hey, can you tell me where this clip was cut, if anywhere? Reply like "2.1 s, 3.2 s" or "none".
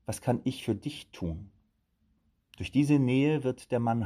none